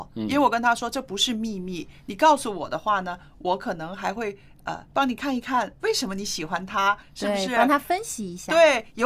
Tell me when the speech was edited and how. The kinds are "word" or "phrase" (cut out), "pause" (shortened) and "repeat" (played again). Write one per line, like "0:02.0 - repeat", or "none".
0:04.9 - pause